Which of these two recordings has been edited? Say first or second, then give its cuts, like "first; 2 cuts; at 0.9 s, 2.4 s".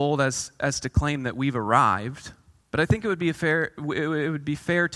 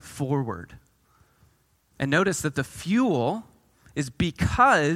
first; 1 cut; at 2.6 s